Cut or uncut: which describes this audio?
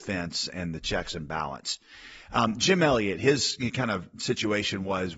uncut